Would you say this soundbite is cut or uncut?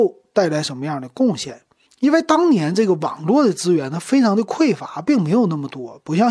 cut